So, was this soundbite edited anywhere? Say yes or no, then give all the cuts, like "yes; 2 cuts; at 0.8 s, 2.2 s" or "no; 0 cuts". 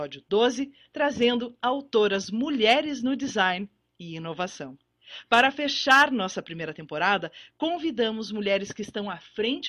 no; 0 cuts